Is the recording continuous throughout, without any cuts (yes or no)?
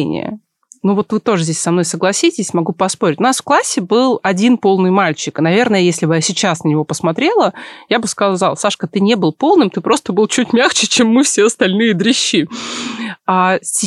yes